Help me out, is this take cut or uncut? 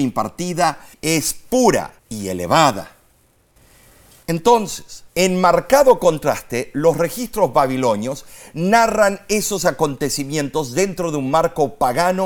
cut